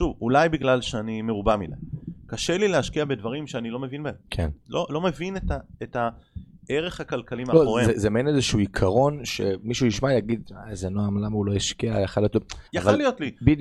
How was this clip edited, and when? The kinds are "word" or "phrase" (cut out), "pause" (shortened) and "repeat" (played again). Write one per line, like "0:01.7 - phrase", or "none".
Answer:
0:04.2 - pause
0:12.7 - pause